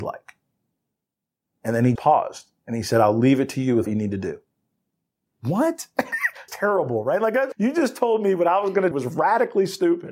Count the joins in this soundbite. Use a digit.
5